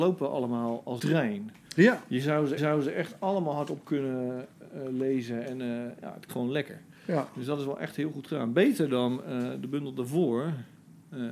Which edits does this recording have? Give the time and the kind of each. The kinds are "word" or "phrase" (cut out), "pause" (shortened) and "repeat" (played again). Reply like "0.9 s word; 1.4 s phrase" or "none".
1.0 s word; 2.6 s repeat; 6.3 s word

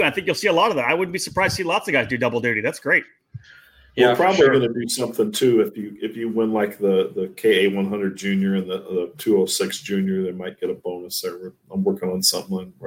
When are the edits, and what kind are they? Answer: none

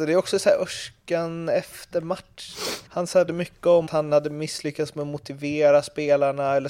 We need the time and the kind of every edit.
2.9 s pause; 3.3 s word; 3.9 s word

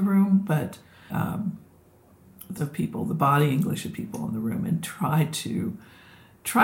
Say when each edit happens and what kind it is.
1.1 s word; 2.6 s word

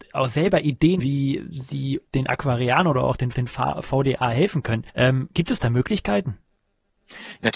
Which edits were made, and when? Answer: 1.0 s word; 2.1 s pause; 3.3 s repeat; 4.9 s pause

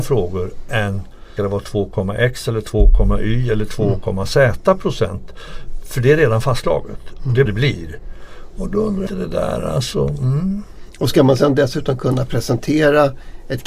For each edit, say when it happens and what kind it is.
1.4 s word; 7.5 s phrase; 9.1 s phrase

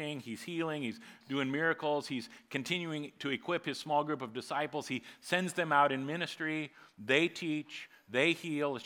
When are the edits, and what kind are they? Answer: none

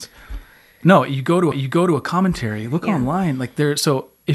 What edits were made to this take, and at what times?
1.5 s repeat

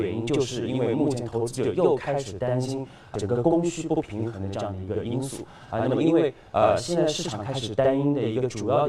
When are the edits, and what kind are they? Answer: 3.1 s word

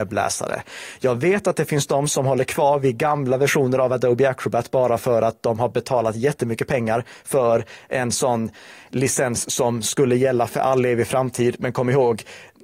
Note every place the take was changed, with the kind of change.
none

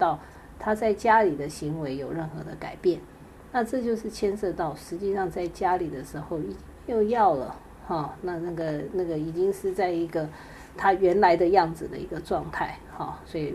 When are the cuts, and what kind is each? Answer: 10.7 s word

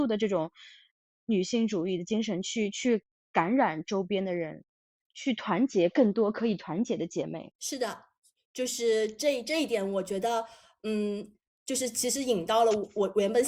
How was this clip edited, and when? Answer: 7.5 s pause

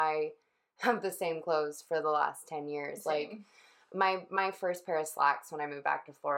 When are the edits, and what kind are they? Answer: none

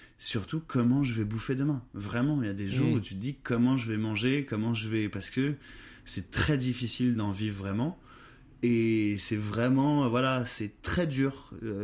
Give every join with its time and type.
none

